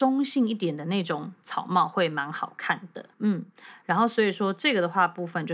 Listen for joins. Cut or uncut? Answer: cut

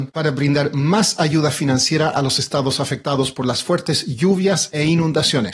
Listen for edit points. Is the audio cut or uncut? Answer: uncut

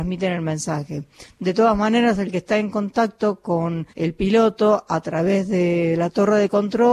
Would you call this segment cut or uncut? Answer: cut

